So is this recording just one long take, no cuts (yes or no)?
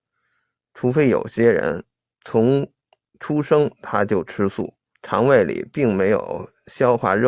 no